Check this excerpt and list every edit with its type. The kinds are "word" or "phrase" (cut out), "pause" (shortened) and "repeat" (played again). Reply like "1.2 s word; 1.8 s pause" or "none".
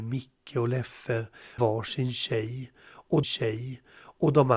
1.6 s word; 3.2 s repeat